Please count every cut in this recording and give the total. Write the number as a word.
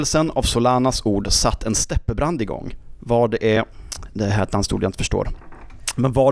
zero